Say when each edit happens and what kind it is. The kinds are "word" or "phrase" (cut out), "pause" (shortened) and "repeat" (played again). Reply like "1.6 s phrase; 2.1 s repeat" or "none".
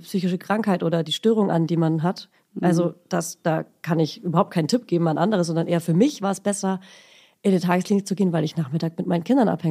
none